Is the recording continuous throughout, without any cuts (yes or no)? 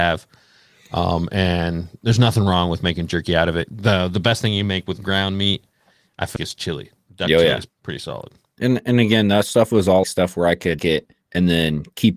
no